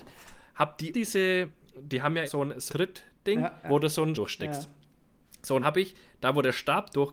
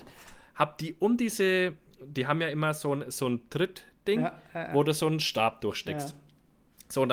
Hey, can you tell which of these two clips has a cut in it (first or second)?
first